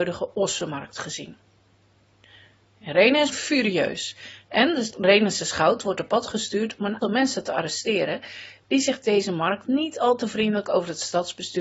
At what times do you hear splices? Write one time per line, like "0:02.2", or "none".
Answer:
0:03.3
0:07.0
0:09.0